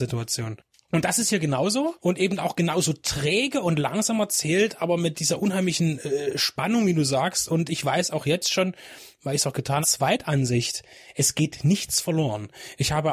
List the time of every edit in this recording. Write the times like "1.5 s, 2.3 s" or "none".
9.8 s

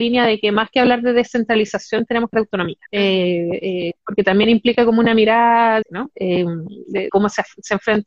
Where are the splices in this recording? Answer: 2.3 s, 2.9 s, 5.8 s, 7.1 s

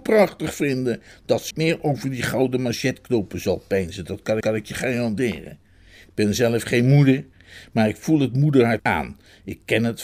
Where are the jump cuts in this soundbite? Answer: 1.5 s, 4.4 s, 8.8 s

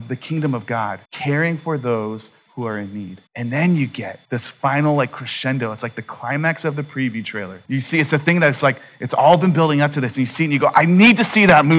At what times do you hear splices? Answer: 1.0 s, 3.3 s, 4.2 s, 7.6 s

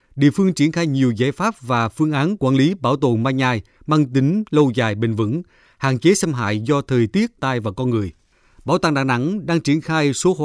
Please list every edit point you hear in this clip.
7.4 s

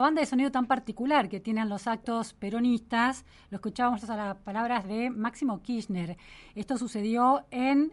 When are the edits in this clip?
none

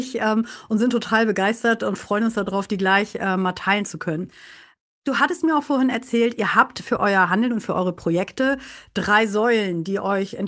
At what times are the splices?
none

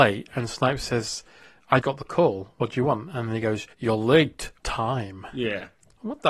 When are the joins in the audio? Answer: 1.8 s, 3.7 s, 4.6 s

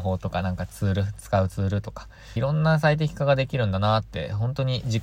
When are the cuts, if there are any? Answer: 2.4 s

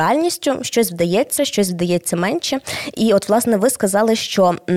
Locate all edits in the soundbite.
1.4 s

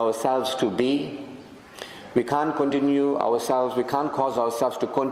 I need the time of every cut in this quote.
none

